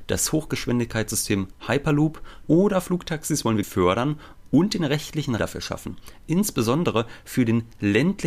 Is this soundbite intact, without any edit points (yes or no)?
no